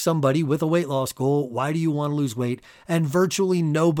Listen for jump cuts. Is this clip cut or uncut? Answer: uncut